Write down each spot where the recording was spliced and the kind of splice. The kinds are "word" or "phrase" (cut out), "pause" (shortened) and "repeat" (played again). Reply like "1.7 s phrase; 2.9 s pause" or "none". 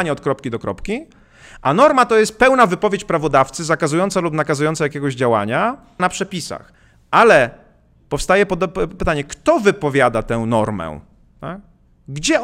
6.0 s word; 9.0 s word